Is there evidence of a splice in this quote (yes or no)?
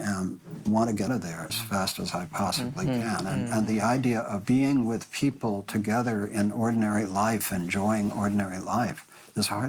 yes